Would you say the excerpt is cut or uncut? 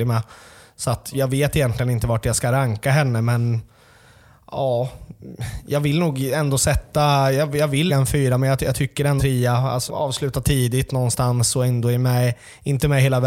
cut